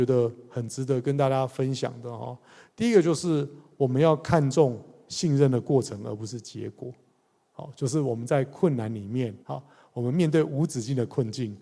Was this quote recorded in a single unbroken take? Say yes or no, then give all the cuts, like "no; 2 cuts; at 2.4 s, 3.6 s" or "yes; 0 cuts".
no; 1 cut; at 9.4 s